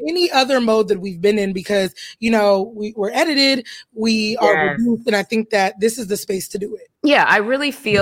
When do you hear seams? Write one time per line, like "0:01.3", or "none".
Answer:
0:06.9

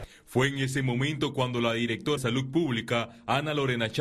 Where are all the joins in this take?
0:02.2

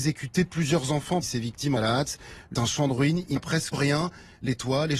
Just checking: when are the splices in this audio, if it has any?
0:01.2
0:01.8
0:02.5
0:03.4
0:03.7

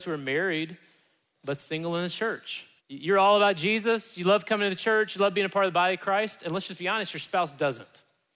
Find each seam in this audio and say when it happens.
0:02.8

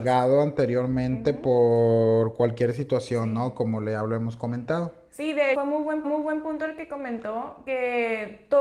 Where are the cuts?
0:05.5
0:06.0

